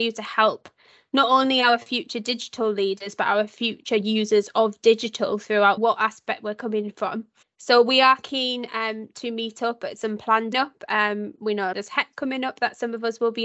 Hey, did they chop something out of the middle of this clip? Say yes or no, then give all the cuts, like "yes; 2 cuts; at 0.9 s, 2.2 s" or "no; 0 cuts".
yes; 4 cuts; at 5.8 s, 7.4 s, 10.5 s, 11.7 s